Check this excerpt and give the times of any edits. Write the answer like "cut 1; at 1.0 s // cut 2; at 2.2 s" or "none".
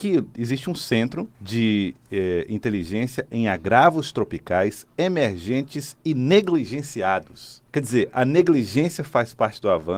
cut 1; at 1.3 s // cut 2; at 7.7 s